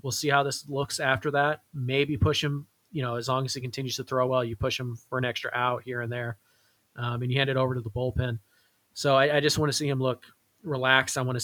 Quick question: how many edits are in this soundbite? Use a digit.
0